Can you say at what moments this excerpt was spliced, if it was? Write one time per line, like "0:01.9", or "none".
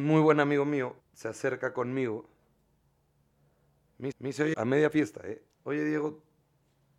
0:01.0
0:04.1
0:04.5